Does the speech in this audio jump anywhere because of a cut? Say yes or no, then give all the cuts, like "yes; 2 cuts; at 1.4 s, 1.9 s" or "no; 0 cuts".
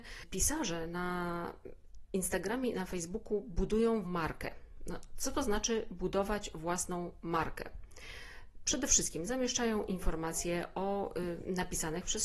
yes; 1 cut; at 4.0 s